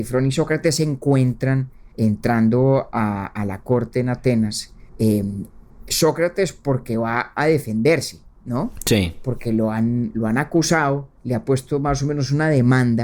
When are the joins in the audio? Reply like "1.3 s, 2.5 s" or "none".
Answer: 1.9 s, 4.9 s, 11.2 s